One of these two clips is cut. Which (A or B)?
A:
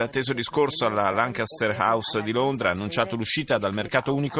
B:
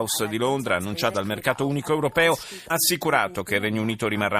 B